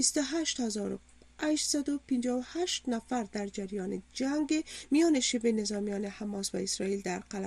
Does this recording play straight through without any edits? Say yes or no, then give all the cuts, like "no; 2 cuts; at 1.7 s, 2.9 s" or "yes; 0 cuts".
yes; 0 cuts